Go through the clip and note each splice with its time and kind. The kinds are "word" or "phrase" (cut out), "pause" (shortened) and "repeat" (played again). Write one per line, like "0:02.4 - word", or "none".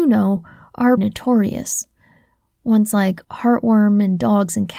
0:01.0 - word
0:03.2 - pause

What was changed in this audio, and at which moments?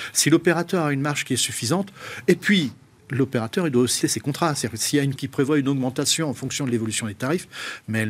0:04.0 - word
0:05.2 - word

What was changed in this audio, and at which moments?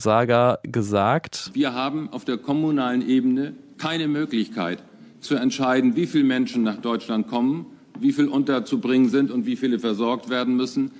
none

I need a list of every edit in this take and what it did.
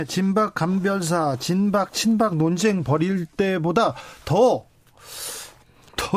none

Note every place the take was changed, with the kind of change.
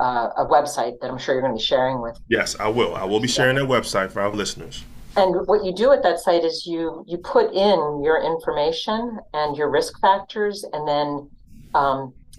0:04.3 - phrase

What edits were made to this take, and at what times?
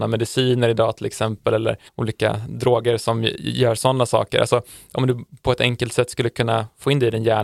0:01.9 - pause

